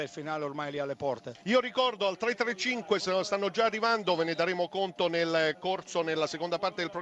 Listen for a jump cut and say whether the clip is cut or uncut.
cut